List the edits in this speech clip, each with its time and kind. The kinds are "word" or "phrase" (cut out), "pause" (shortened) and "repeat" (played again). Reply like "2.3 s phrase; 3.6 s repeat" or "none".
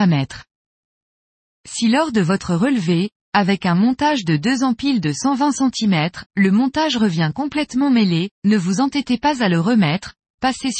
6.3 s pause; 8.3 s pause